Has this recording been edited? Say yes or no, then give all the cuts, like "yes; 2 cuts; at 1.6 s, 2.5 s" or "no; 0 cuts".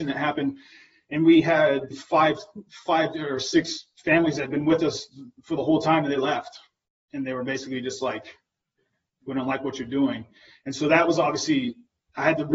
yes; 1 cut; at 1.9 s